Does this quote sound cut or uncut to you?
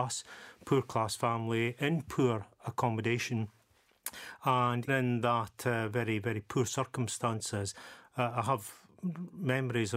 cut